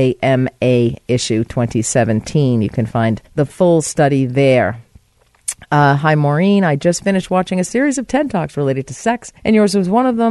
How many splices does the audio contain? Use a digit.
2